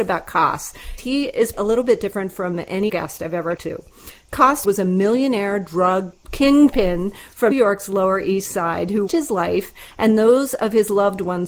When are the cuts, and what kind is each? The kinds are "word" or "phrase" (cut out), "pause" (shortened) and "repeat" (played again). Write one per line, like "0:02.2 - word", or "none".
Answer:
0:01.0 - word
0:01.5 - word
0:02.9 - word
0:03.6 - word
0:04.6 - word
0:07.5 - word
0:09.1 - word